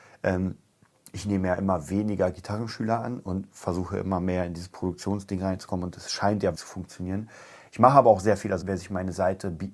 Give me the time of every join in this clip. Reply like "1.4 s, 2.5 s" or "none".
6.5 s, 8.6 s

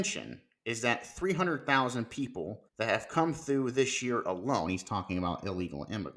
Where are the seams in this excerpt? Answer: 2.7 s

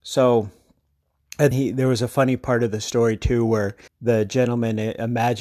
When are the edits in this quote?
1.5 s, 3.9 s

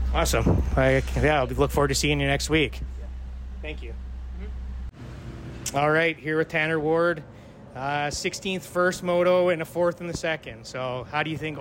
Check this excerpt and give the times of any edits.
none

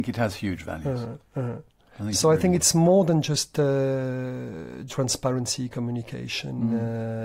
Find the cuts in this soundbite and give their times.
4.9 s

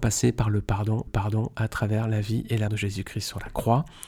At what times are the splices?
1.1 s, 2.7 s

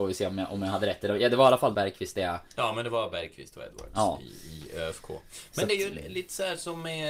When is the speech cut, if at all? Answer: 1.7 s

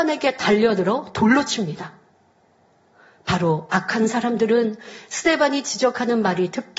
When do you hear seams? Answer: none

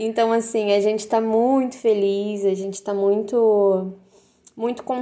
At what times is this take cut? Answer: none

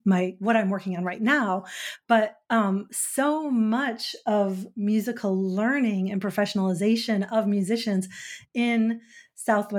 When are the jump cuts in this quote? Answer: none

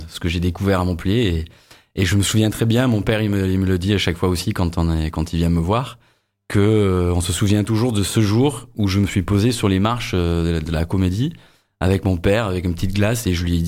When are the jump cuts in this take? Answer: none

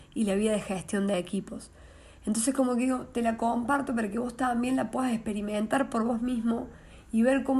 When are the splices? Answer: none

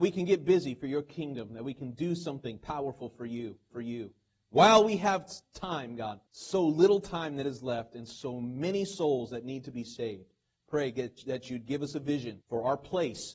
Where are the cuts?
3.7 s, 6.3 s, 12.4 s

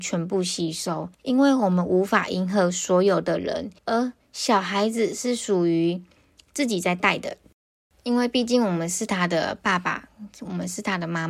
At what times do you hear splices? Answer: 1.1 s, 3.8 s

